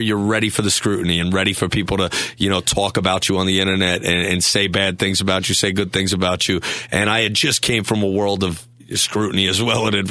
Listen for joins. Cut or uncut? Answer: uncut